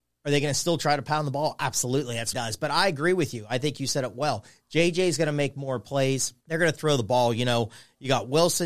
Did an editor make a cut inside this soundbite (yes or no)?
yes